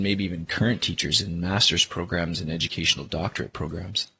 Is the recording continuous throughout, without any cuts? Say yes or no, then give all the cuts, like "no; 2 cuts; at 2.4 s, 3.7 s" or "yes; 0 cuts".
yes; 0 cuts